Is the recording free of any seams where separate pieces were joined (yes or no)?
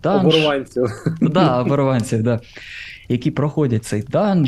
yes